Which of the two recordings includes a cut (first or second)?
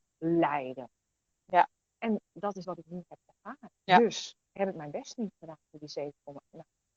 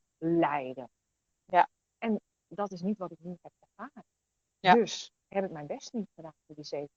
first